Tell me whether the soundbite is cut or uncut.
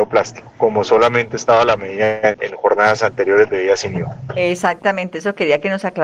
uncut